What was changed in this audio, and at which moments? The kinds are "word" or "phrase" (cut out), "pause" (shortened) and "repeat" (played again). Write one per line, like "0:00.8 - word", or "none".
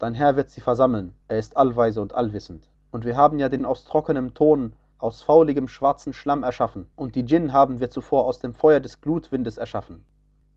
0:01.2 - pause
0:02.7 - pause
0:03.6 - word
0:06.9 - pause